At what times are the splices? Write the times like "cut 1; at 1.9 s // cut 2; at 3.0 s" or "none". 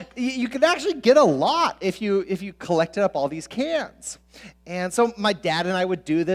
none